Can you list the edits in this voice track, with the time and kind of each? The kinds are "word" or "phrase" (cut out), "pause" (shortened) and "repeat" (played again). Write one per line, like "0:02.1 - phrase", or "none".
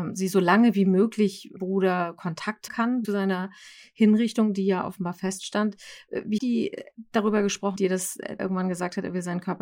0:01.6 - phrase
0:02.7 - word
0:03.0 - word
0:06.4 - word
0:07.8 - word
0:08.4 - phrase